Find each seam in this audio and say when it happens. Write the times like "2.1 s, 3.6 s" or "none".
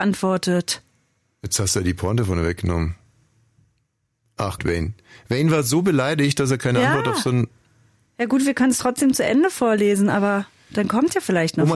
4.6 s